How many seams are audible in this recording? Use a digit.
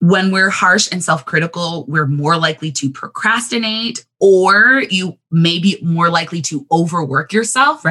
0